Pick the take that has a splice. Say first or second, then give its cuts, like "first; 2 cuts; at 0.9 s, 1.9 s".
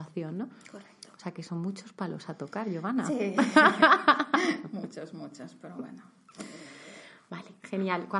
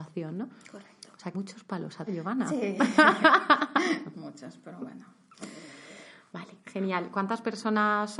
second; 3 cuts; at 1.3 s, 2.1 s, 4.1 s